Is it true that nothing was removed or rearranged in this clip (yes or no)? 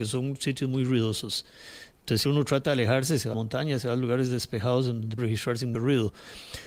no